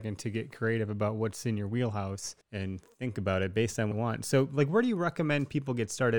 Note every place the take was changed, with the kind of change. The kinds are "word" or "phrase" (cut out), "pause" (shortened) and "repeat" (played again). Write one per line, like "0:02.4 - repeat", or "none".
0:02.4 - pause
0:03.9 - phrase